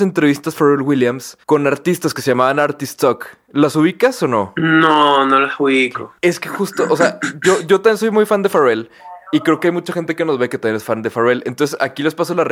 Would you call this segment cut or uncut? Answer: cut